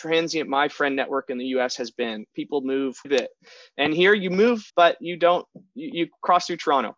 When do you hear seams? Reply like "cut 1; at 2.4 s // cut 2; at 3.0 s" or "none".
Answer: cut 1; at 3.0 s // cut 2; at 4.7 s